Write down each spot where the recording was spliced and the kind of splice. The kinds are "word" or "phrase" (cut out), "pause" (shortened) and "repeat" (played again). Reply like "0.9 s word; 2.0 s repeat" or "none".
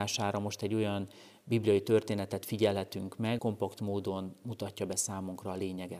3.4 s word